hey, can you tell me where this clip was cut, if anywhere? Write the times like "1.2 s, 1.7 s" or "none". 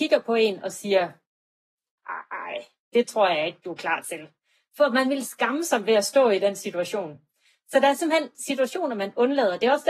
none